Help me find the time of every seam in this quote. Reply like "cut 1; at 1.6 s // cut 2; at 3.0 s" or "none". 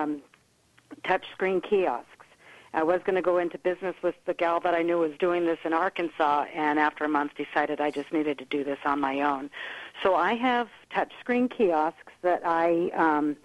none